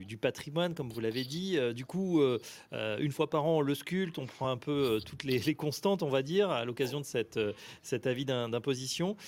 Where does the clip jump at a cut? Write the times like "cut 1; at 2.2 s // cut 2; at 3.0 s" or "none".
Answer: none